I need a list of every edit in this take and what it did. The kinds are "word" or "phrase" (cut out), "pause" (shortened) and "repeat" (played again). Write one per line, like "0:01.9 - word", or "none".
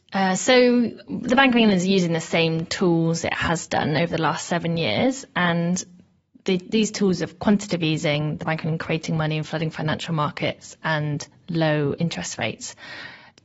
none